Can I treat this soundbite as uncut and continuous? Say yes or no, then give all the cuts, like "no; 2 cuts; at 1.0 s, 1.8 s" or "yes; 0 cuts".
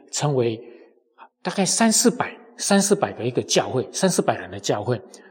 no; 1 cut; at 1.3 s